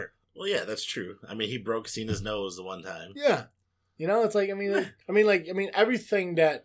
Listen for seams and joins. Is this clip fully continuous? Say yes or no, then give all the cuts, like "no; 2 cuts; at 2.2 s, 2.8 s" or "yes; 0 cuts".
no; 1 cut; at 5.0 s